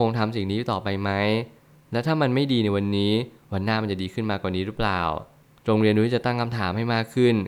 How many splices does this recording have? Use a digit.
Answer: 0